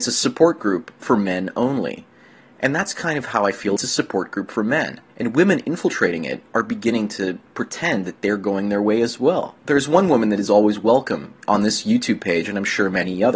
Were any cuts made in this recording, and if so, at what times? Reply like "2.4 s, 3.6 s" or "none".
3.8 s, 5.1 s, 9.6 s